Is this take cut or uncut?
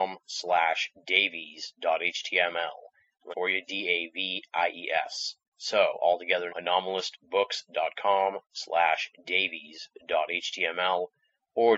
cut